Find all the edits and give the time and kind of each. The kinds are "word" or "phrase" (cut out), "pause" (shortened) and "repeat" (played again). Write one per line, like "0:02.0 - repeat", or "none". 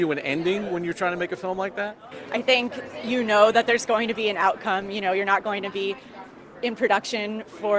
none